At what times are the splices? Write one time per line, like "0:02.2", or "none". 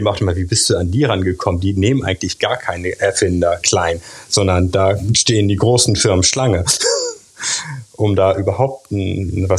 0:03.6